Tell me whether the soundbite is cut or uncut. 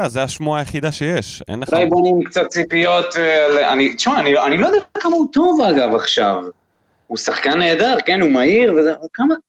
uncut